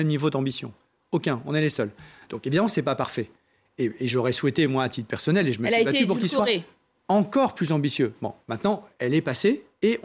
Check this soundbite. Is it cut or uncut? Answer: uncut